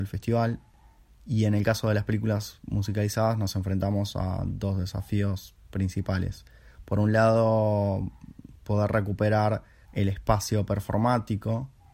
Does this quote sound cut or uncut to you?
cut